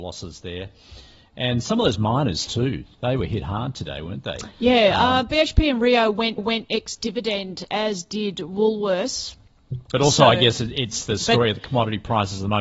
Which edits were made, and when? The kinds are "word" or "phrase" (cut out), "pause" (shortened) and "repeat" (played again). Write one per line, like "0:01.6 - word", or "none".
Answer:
0:06.4 - repeat